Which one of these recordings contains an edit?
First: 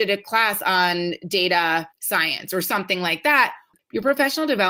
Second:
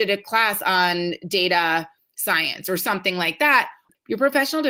first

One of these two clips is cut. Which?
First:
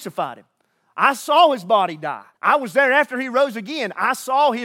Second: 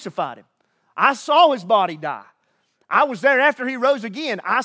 first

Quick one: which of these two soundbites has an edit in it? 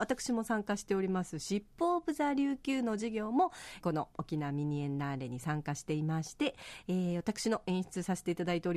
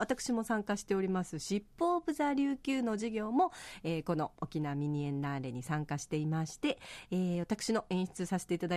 first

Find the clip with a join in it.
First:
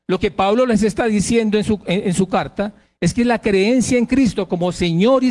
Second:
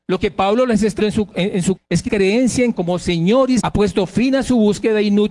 second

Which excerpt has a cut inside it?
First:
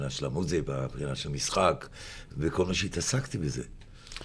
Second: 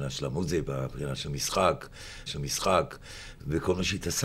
second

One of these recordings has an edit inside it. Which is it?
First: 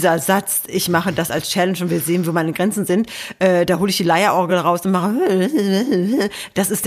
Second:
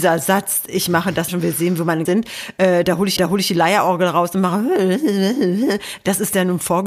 second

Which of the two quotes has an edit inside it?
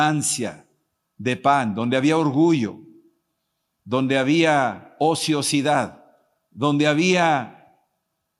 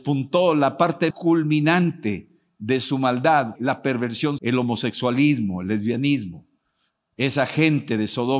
second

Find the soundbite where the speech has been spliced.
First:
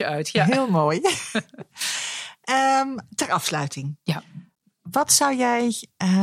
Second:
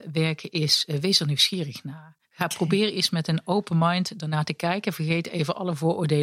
second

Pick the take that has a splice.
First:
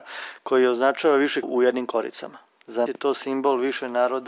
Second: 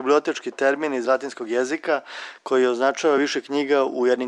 first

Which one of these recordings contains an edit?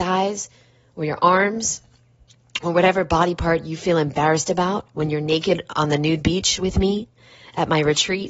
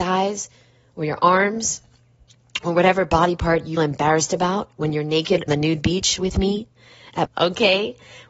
second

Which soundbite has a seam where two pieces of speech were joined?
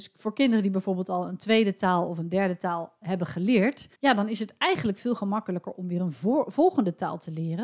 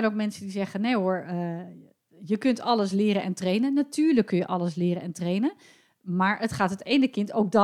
first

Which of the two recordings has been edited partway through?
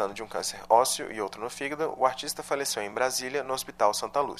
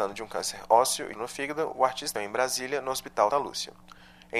second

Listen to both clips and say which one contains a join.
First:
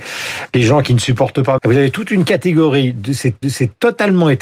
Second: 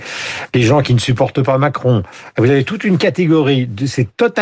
first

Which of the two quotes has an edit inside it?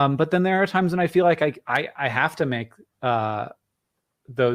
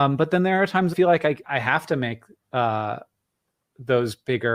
second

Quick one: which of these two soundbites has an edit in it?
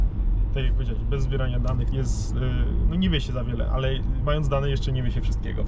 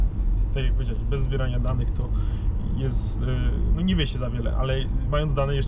first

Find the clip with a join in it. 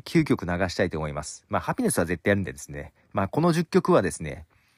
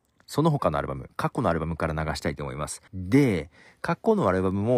second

